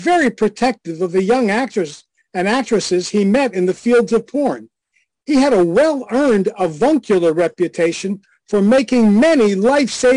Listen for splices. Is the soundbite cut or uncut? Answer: uncut